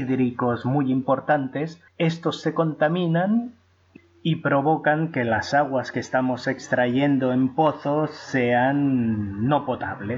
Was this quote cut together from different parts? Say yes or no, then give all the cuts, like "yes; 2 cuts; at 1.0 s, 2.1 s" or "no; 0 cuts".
yes; 1 cut; at 1.9 s